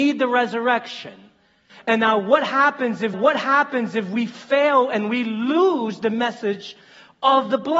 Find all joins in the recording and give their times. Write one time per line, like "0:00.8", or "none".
0:03.1